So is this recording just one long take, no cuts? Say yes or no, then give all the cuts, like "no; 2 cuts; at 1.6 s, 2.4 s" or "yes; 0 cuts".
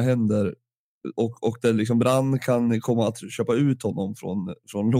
yes; 0 cuts